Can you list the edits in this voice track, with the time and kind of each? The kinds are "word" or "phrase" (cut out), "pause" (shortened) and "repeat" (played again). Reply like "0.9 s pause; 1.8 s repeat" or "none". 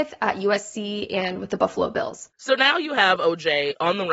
2.3 s pause